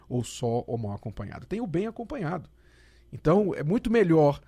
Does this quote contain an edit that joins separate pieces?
no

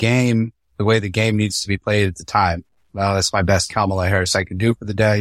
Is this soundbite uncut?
yes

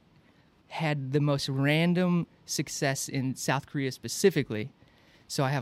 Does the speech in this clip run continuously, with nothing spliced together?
yes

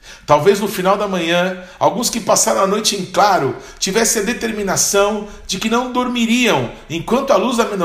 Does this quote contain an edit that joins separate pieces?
no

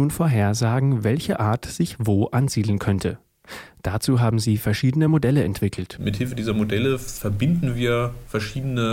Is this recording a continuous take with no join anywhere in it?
yes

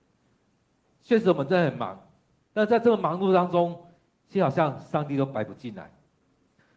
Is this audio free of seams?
yes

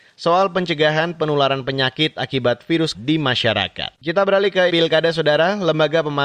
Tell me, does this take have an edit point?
yes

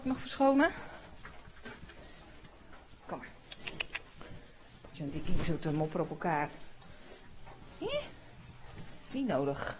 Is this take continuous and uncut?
no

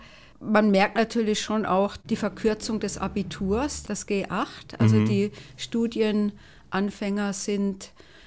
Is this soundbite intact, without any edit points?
yes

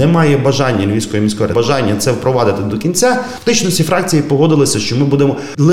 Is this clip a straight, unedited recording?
no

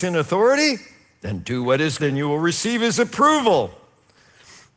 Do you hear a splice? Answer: yes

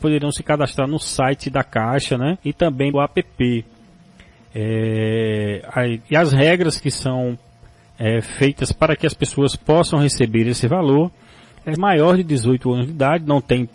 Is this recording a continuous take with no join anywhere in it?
no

